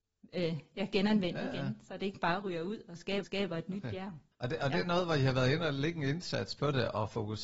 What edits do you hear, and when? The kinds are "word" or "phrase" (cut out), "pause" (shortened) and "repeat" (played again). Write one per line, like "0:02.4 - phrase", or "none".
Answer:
0:03.2 - repeat
0:04.3 - pause